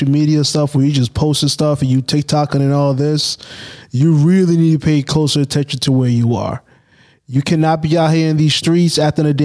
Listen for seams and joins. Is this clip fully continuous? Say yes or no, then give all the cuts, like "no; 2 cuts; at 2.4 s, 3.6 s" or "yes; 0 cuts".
yes; 0 cuts